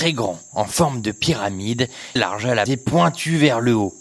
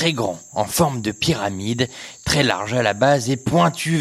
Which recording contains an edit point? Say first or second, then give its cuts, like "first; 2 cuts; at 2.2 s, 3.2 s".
first; 2 cuts; at 2.2 s, 2.7 s